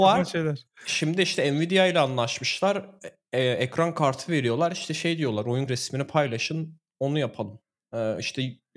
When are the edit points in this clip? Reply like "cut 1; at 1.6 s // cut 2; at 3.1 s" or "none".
cut 1; at 5.7 s